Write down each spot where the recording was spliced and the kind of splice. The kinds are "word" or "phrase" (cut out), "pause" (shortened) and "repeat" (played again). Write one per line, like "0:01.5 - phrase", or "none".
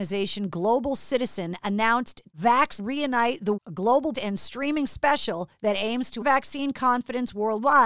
0:02.3 - word
0:02.8 - phrase
0:03.6 - word
0:04.1 - word
0:05.5 - pause
0:06.2 - word